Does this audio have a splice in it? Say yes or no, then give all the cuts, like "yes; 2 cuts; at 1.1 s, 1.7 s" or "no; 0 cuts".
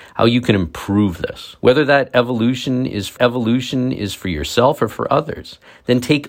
yes; 2 cuts; at 1.6 s, 3.2 s